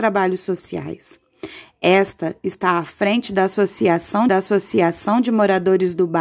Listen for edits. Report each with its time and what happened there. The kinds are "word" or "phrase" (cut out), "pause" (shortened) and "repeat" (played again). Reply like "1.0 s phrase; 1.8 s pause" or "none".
4.3 s repeat

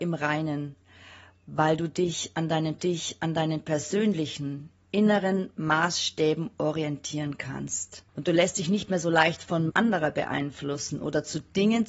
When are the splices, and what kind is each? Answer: 2.8 s repeat; 8.1 s pause; 9.7 s word

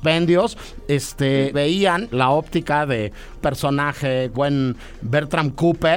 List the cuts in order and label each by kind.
1.5 s word; 2.1 s word; 3.4 s word; 4.3 s phrase

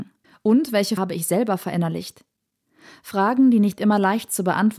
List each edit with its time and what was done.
1.0 s word

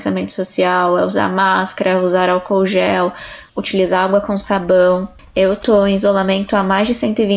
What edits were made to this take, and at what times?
3.5 s pause

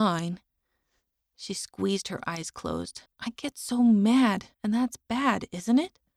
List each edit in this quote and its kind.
3.1 s pause; 4.5 s pause

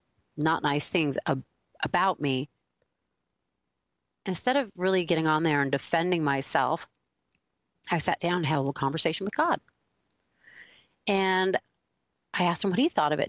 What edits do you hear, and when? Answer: none

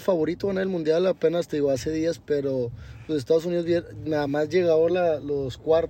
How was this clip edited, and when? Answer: none

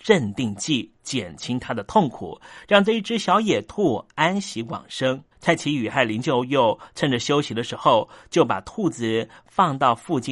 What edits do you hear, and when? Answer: 5.3 s pause

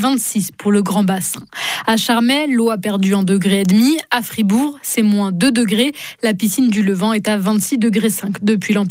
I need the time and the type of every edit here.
none

